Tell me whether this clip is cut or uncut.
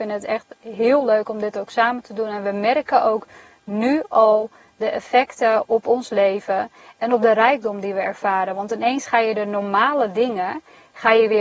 uncut